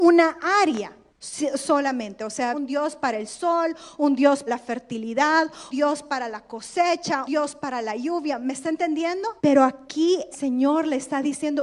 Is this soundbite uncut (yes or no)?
no